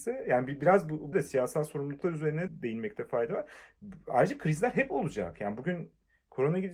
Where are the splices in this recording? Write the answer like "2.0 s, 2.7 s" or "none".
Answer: 1.1 s, 2.5 s